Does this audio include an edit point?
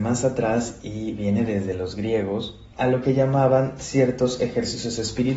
no; 0 cuts

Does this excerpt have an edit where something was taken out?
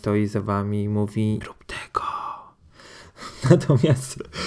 yes; 1 cut; at 1.4 s

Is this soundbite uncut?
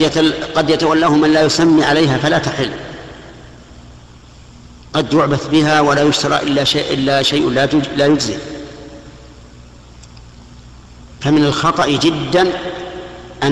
no; 1 cut; at 11.1 s

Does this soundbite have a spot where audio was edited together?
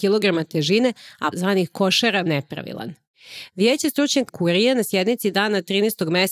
yes; 3 cuts; at 1.3 s, 2.3 s, 4.3 s

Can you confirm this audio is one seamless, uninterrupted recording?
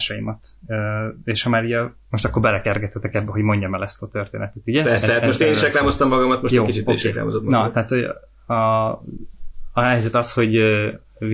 yes; 0 cuts

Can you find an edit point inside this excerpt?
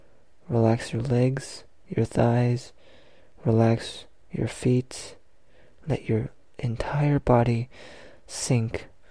no; 0 cuts

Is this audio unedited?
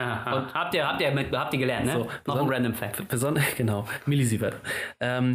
yes; 0 cuts

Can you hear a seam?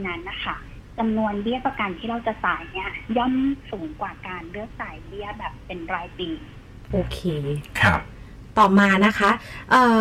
yes; 1 cut; at 6.9 s

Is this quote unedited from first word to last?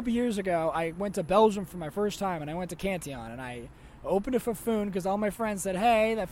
yes; 0 cuts

